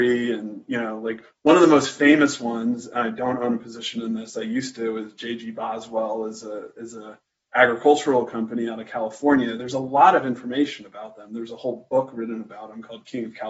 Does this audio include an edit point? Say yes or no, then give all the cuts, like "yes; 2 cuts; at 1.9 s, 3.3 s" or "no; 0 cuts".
no; 0 cuts